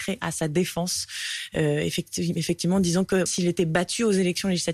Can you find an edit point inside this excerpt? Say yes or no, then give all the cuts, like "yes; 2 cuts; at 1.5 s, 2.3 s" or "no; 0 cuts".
yes; 1 cut; at 3.3 s